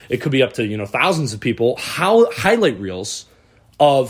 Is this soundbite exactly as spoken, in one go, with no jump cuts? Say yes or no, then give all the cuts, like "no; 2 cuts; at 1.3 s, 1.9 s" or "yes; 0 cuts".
yes; 0 cuts